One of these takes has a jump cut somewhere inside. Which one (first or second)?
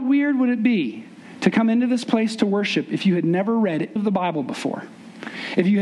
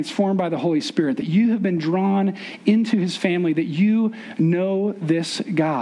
first